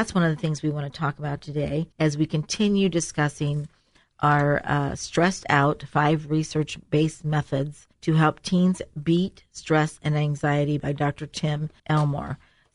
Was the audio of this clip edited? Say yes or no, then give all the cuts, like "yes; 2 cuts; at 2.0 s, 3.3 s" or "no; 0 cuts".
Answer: yes; 3 cuts; at 1.9 s, 7.9 s, 11.8 s